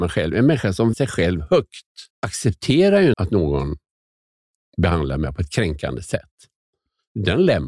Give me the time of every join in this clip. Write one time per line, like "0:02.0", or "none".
0:00.9
0:02.1
0:03.1